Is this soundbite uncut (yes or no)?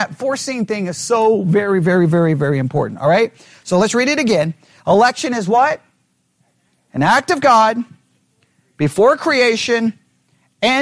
yes